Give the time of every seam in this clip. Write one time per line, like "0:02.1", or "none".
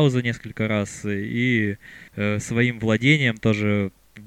0:02.1